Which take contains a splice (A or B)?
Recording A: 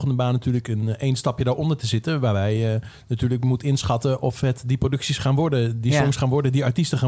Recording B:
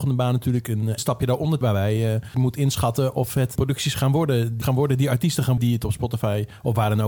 B